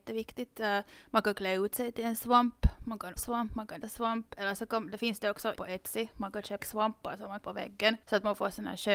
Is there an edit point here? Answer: yes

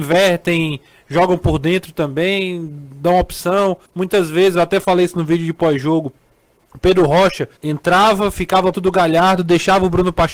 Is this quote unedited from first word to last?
no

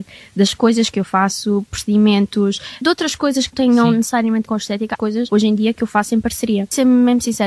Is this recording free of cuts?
no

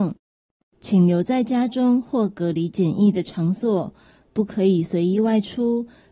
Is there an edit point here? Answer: no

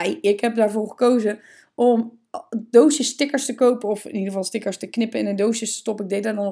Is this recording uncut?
yes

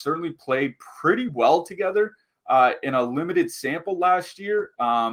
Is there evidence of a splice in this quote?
no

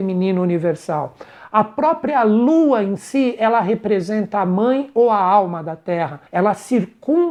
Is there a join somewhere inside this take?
yes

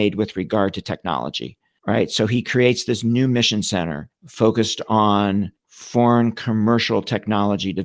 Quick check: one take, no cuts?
yes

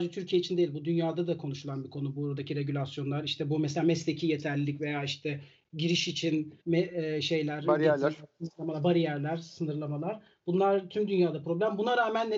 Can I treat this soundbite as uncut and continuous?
no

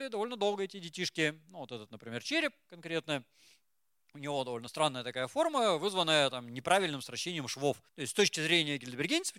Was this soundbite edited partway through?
no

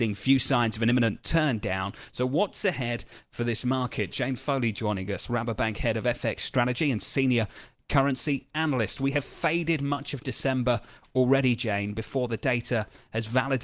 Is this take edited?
no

